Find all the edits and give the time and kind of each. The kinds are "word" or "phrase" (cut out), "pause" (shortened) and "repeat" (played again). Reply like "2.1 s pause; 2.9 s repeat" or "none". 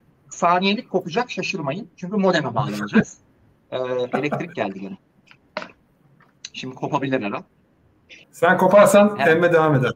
8.2 s pause